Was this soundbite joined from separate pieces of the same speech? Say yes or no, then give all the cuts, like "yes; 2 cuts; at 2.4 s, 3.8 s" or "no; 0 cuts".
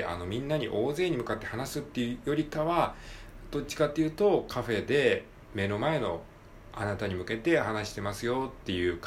no; 0 cuts